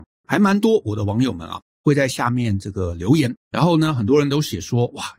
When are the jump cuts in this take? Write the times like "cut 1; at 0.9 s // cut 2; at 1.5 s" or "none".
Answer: cut 1; at 3.4 s